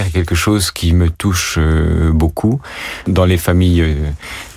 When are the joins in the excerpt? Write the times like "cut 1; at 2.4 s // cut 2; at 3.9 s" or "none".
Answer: none